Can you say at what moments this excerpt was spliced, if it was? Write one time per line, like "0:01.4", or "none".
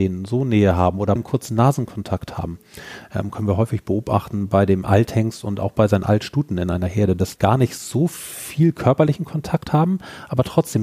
0:01.2
0:07.4